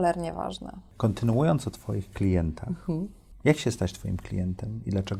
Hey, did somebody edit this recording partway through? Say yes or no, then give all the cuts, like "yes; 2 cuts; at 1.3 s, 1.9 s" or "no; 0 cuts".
no; 0 cuts